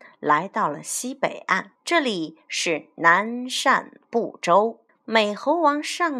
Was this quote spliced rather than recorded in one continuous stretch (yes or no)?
yes